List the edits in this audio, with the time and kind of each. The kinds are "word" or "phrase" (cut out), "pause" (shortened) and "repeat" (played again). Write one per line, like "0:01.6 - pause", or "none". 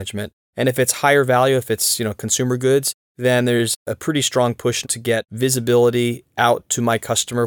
0:04.8 - word